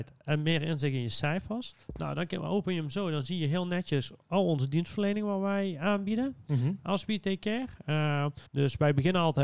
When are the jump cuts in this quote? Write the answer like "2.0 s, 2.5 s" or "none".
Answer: 1.8 s, 8.5 s